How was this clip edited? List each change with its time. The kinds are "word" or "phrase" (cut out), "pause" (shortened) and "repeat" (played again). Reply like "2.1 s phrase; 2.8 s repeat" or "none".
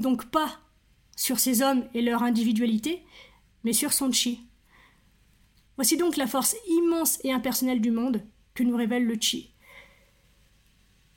none